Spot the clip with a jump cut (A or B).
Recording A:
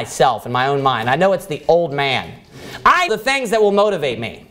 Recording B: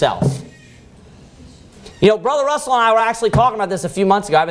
A